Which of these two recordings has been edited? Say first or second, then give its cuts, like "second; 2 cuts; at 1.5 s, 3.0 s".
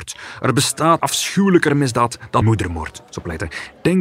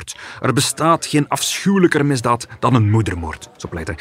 first; 2 cuts; at 1.0 s, 2.4 s